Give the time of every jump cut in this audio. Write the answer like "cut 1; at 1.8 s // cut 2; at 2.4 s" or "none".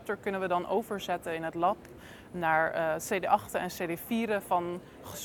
none